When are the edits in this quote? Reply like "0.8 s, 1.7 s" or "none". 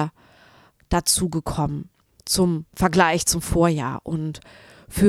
none